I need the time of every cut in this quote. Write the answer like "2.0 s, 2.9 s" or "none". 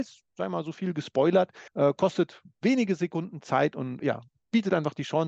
1.7 s, 4.0 s